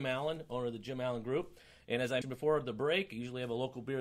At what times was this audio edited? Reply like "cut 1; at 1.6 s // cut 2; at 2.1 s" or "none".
cut 1; at 2.2 s